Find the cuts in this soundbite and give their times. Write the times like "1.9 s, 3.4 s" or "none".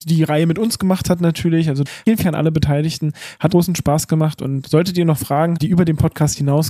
2.2 s, 3.5 s, 4.6 s, 5.5 s